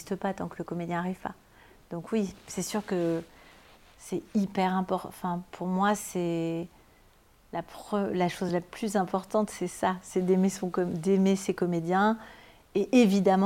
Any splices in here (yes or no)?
no